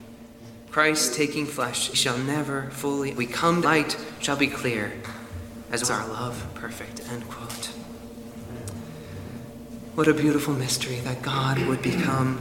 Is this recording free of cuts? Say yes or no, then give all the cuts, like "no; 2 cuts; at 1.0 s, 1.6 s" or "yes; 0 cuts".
no; 4 cuts; at 1.9 s, 3.2 s, 3.6 s, 5.8 s